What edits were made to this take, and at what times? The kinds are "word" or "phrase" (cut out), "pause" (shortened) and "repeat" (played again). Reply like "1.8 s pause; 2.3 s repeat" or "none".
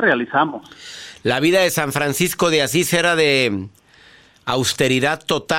none